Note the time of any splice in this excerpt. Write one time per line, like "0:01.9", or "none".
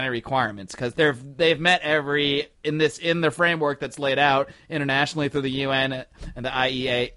0:00.9
0:02.5

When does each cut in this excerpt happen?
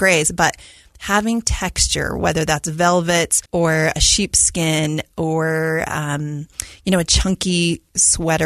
0:03.5

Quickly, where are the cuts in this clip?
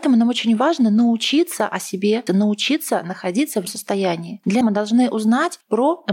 0:02.3
0:03.7
0:04.6

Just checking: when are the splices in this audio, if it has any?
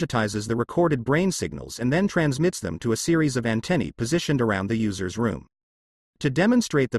none

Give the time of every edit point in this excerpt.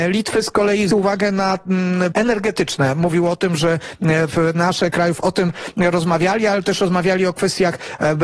0:00.9
0:02.1
0:04.9

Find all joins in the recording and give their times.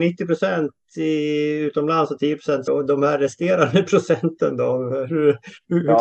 0:02.7

